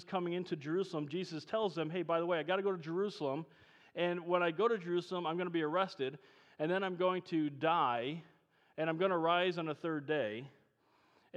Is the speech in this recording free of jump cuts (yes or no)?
yes